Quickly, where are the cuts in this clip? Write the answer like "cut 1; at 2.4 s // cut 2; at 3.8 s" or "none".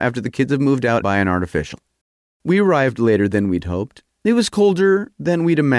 cut 1; at 1.0 s // cut 2; at 2.0 s // cut 3; at 4.1 s